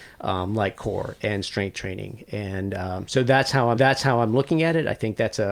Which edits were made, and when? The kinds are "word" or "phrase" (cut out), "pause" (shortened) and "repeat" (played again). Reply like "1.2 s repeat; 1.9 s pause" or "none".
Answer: 3.8 s repeat